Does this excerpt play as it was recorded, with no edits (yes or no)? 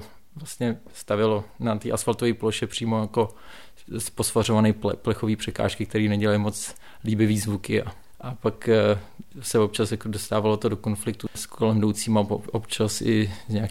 yes